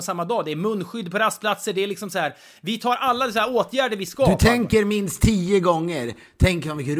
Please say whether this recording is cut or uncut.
uncut